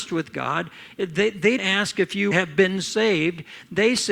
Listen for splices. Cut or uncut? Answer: cut